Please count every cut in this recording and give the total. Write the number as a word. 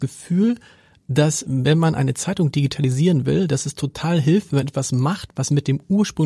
zero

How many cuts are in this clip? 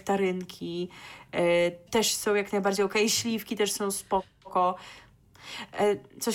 one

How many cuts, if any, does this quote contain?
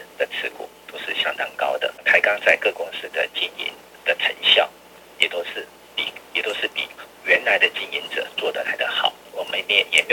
two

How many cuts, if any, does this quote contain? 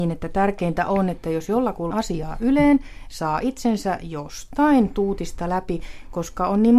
one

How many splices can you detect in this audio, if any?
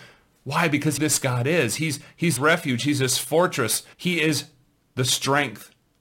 three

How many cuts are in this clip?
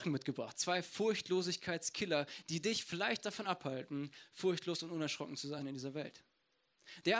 zero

